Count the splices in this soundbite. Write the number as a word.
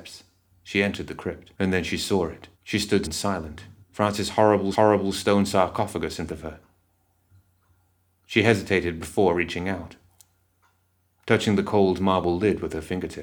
six